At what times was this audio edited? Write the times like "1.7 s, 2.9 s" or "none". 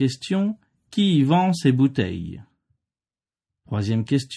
none

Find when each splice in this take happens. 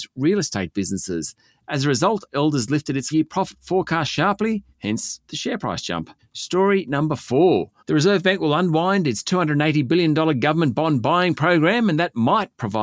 3.1 s, 4.7 s, 6.2 s, 7.8 s

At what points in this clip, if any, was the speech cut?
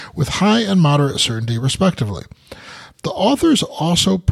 none

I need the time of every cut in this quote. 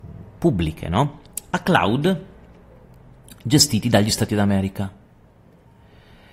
4.3 s

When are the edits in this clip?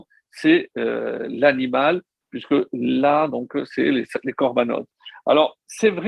none

